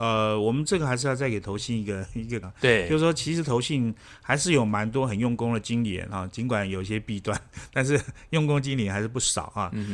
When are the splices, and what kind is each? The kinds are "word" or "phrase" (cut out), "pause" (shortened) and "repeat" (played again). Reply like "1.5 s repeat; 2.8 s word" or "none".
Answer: 2.4 s word